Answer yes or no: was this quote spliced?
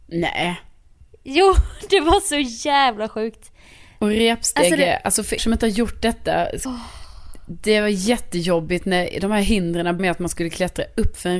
yes